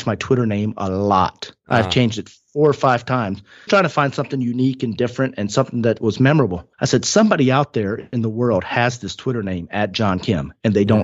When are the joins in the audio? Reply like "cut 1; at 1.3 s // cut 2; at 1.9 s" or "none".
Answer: cut 1; at 3.7 s // cut 2; at 6.7 s